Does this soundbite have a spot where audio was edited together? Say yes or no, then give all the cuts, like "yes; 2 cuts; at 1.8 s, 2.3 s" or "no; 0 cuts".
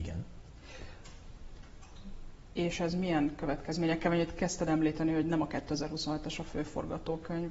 no; 0 cuts